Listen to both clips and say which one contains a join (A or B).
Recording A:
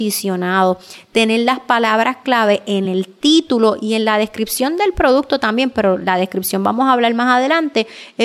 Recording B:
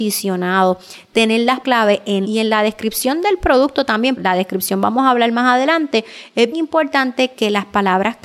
B